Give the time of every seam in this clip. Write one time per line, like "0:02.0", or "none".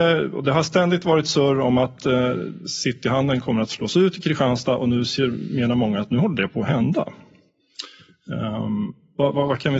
none